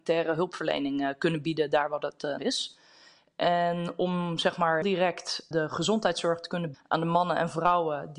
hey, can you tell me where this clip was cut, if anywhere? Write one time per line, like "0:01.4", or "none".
0:02.4
0:04.8
0:05.5
0:06.7